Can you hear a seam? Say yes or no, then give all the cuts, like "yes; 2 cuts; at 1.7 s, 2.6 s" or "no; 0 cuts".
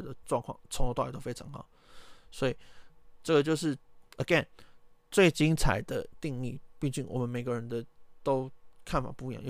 no; 0 cuts